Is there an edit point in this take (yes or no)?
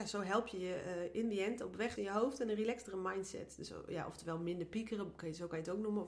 yes